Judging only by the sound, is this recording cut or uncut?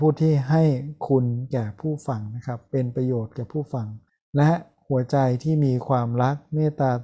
cut